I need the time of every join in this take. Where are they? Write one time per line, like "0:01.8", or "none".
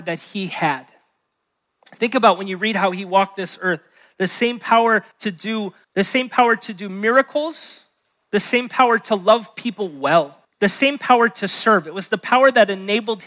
0:05.1
0:05.8
0:10.4